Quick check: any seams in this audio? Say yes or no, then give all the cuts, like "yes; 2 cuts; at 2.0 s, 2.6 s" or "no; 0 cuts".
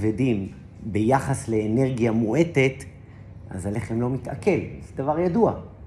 no; 0 cuts